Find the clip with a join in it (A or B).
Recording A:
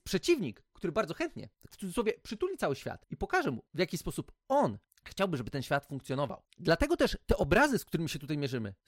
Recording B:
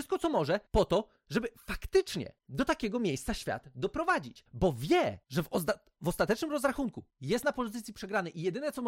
B